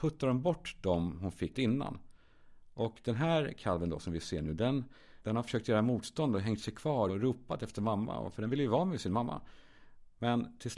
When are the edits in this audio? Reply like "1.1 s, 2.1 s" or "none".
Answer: 1.5 s, 5.2 s, 7.1 s